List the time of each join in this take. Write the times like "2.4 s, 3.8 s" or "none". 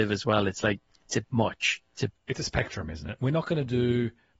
1.2 s, 2.1 s

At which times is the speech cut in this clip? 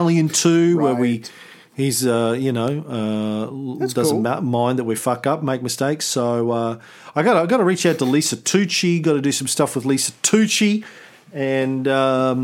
none

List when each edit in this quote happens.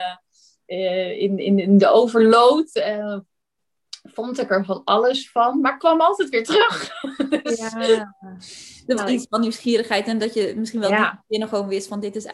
9.0 s

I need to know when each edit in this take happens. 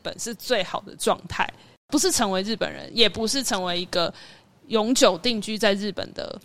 none

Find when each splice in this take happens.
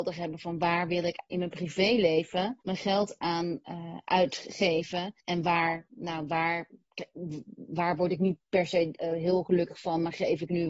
2.6 s, 5.2 s, 9.0 s

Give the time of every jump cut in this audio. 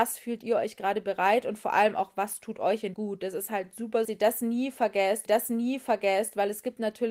2.9 s, 4.0 s, 5.3 s

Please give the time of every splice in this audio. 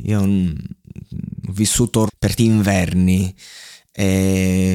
2.1 s, 2.4 s

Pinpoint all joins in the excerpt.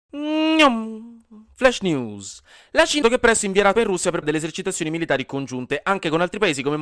3.0 s, 3.7 s, 4.2 s

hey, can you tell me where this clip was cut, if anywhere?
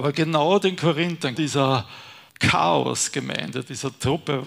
1.3 s, 2.3 s

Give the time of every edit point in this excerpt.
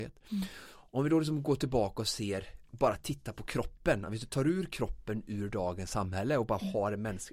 2.7 s

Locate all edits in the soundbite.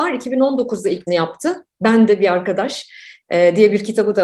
1.1 s, 2.1 s

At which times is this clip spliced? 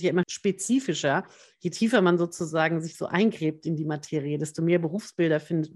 none

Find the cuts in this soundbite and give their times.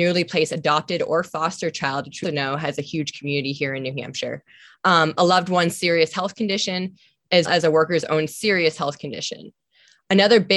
2.2 s, 7.5 s

